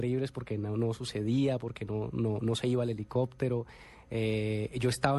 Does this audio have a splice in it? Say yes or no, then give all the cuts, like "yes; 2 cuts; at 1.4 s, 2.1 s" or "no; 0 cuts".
no; 0 cuts